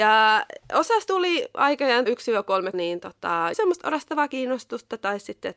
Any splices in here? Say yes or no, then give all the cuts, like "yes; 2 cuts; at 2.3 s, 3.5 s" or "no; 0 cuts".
yes; 4 cuts; at 1.1 s, 2.1 s, 2.7 s, 3.5 s